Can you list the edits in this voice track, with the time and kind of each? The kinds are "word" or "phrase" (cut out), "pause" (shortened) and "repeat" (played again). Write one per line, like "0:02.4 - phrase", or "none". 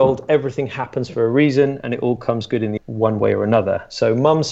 0:02.8 - word